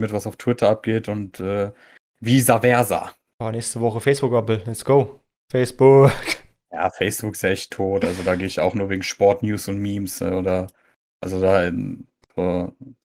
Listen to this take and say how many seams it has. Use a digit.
0